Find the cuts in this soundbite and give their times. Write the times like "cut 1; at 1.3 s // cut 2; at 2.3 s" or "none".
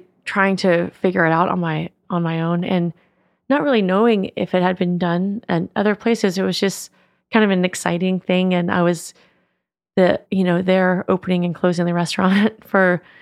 cut 1; at 10.3 s